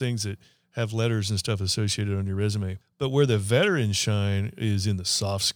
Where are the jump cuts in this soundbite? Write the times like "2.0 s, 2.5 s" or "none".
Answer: 2.8 s